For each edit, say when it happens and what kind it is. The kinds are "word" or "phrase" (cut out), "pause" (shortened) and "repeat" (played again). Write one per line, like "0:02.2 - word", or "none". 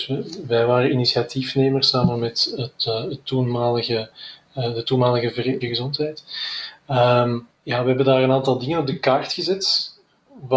0:05.6 - phrase
0:07.5 - pause